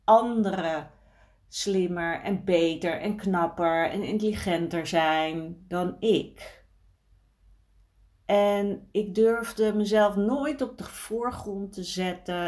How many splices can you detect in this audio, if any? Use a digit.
0